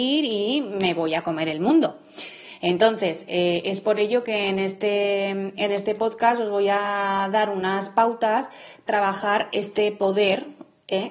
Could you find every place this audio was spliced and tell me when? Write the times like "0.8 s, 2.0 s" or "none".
8.9 s